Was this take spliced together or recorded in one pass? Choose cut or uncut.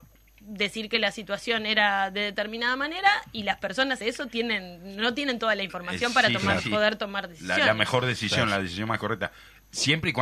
cut